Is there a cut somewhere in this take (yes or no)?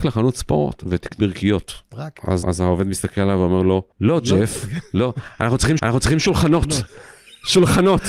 yes